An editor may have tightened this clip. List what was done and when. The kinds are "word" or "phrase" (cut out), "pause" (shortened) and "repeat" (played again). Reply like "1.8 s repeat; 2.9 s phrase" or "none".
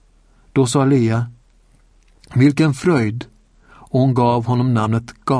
none